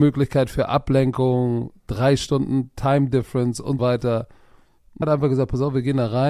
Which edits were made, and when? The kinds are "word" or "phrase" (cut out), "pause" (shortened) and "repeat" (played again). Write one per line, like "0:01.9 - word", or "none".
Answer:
0:03.8 - word
0:05.0 - word